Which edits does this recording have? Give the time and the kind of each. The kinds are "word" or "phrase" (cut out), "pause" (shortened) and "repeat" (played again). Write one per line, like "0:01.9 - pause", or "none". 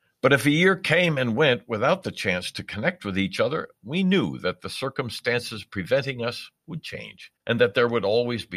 0:06.6 - pause
0:07.4 - pause